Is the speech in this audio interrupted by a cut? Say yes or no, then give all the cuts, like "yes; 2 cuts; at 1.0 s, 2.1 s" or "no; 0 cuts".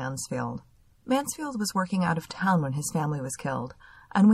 no; 0 cuts